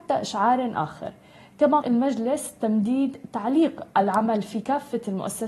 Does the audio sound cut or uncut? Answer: cut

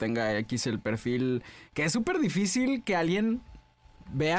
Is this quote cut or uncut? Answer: uncut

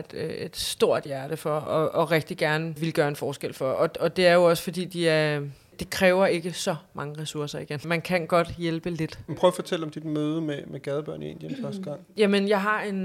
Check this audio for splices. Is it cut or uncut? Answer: uncut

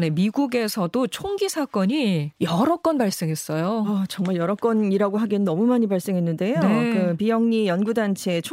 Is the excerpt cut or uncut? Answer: cut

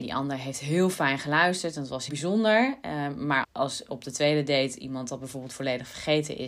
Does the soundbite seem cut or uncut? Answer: cut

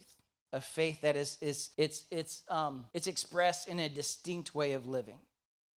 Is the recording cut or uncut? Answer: cut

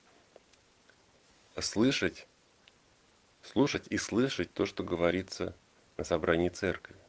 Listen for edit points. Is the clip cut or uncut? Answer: uncut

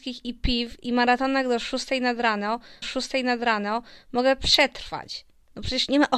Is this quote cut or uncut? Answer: cut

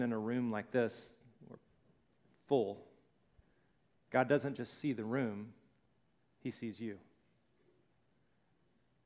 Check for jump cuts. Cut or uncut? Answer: uncut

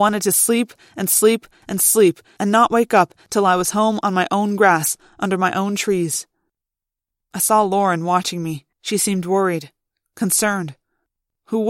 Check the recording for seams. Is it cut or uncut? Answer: cut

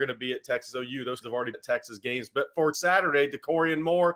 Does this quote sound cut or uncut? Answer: cut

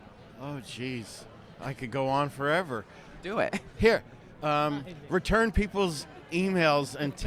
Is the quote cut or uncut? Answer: uncut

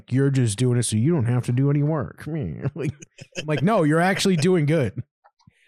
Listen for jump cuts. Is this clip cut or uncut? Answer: uncut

